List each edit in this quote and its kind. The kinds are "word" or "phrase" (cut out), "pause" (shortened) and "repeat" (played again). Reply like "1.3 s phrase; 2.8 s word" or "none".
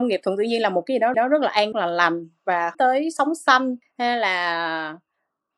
1.1 s repeat; 1.7 s phrase; 2.7 s word